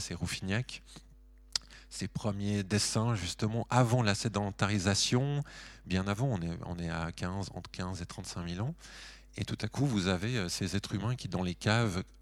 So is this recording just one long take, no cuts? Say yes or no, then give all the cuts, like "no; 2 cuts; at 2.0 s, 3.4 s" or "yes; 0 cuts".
yes; 0 cuts